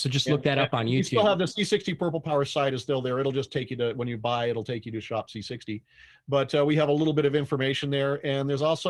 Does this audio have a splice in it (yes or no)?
no